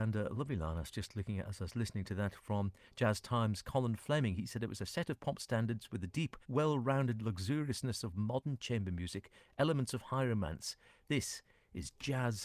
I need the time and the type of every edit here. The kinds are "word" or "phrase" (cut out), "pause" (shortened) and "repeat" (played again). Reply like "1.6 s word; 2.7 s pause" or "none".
6.4 s pause